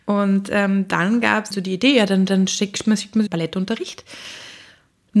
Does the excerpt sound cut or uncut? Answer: cut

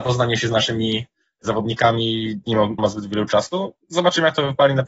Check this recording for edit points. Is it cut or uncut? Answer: cut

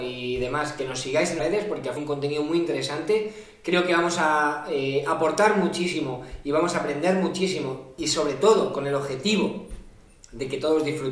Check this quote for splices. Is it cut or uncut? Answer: cut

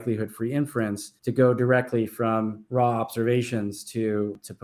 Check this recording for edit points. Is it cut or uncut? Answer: cut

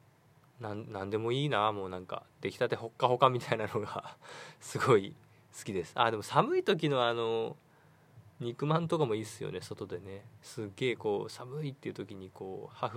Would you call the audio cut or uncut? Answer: uncut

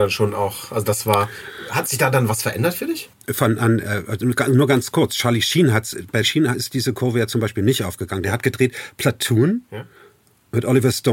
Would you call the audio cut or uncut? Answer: cut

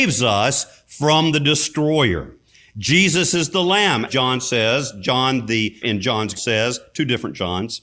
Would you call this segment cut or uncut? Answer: cut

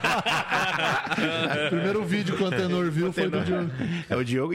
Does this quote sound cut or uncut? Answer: uncut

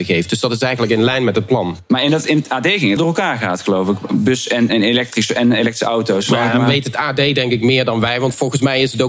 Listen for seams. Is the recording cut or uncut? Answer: cut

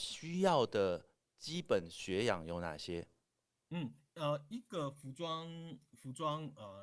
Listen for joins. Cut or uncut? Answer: uncut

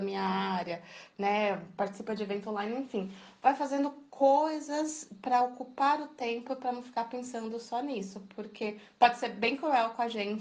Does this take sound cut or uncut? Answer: uncut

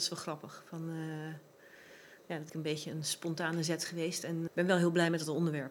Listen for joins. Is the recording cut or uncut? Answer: cut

